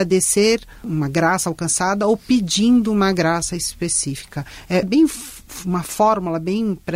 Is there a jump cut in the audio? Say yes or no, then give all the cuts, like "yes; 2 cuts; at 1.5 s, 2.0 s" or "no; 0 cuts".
yes; 1 cut; at 4.8 s